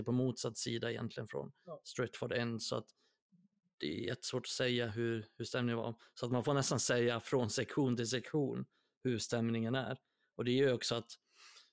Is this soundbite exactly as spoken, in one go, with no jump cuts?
yes; 0 cuts

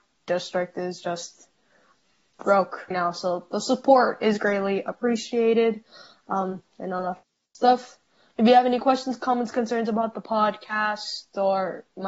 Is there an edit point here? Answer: yes; 1 cut; at 2.9 s

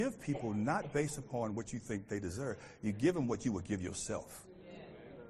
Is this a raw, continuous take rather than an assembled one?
yes; 0 cuts

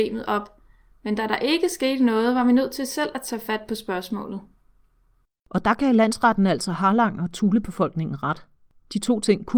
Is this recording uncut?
yes; 0 cuts

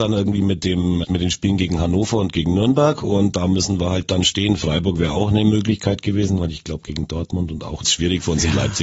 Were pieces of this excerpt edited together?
yes; 2 cuts; at 1.0 s, 7.8 s

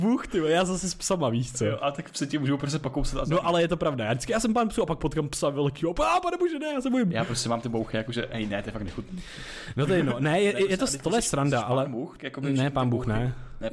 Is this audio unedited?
no; 1 cut; at 12.2 s

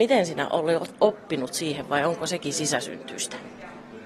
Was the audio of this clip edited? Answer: no; 0 cuts

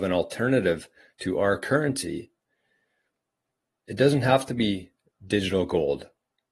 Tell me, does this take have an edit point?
no; 0 cuts

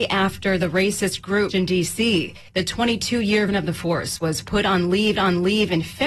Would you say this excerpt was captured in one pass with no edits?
no; 4 cuts; at 1.5 s, 2.5 s, 3.5 s, 5.1 s

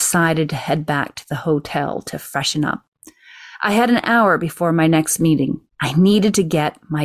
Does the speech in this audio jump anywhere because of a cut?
yes; 1 cut; at 5.7 s

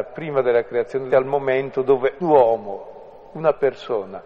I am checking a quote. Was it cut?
yes; 2 cuts; at 1.1 s, 2.2 s

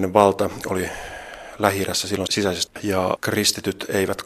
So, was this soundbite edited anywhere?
yes; 1 cut; at 2.7 s

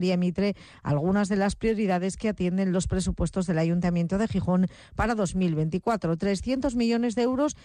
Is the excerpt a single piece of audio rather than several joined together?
yes; 0 cuts

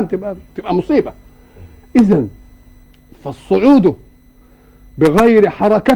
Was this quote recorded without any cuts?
yes; 0 cuts

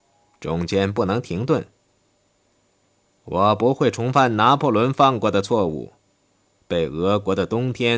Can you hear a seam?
no; 0 cuts

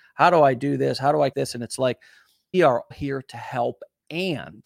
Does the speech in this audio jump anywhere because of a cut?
yes; 3 cuts; at 1.3 s, 2.5 s, 2.9 s

